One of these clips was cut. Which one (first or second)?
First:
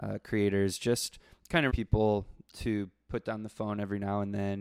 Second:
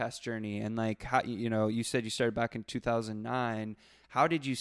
first